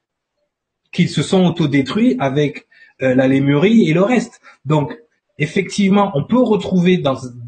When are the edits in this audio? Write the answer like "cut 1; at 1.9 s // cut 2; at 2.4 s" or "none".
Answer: none

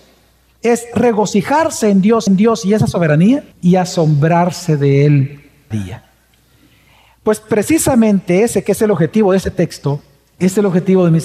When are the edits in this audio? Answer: cut 1; at 2.3 s // cut 2; at 3.5 s // cut 3; at 5.7 s

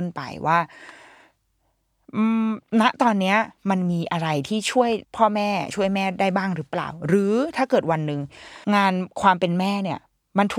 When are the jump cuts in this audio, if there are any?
cut 1; at 5.0 s // cut 2; at 8.6 s

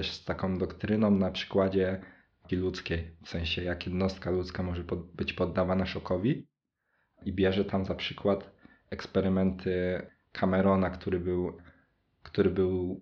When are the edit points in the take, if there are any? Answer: cut 1; at 2.5 s

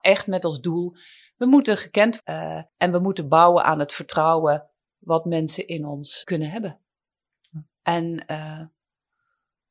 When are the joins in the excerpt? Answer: cut 1; at 2.2 s // cut 2; at 2.7 s // cut 3; at 6.2 s

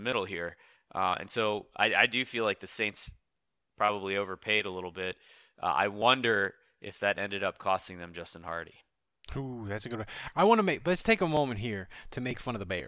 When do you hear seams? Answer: none

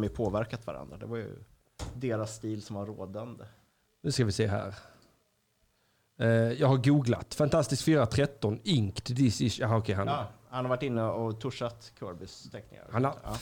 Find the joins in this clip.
none

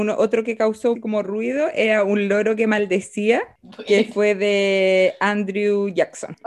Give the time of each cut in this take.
cut 1; at 0.9 s

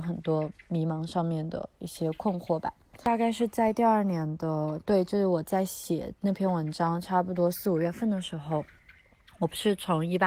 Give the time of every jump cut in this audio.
none

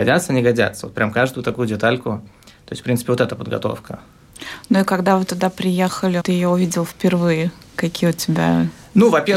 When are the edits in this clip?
cut 1; at 6.2 s

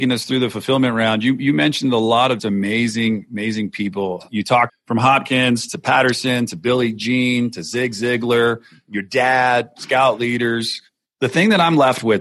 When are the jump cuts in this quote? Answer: cut 1; at 2.4 s // cut 2; at 4.7 s

